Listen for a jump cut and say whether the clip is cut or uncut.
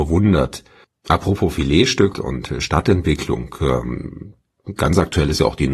cut